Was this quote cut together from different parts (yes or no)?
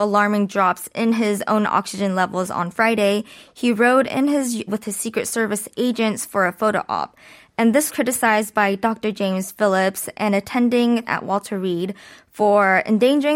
yes